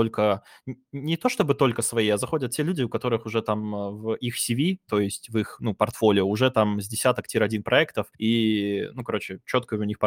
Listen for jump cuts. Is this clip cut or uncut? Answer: cut